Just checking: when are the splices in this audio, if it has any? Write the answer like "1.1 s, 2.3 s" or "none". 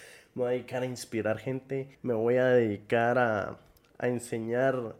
1.9 s

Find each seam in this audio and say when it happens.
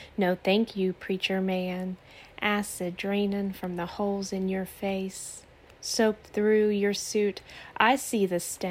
7.0 s

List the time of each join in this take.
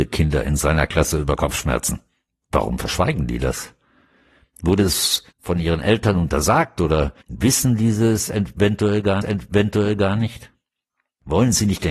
5.3 s, 7.2 s, 9.2 s

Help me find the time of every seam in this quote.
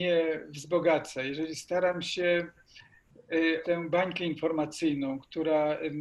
3.6 s

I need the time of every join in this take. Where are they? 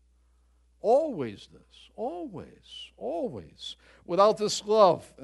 1.5 s

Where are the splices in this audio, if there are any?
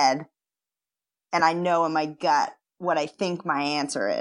none

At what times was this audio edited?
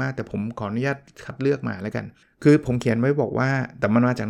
2.2 s

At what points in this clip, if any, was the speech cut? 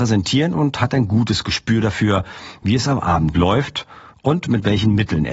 none

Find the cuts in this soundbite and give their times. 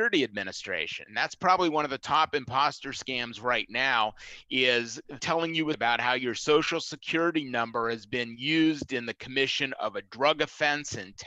5.2 s, 5.7 s

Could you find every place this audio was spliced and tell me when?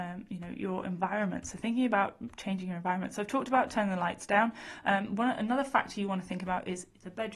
none

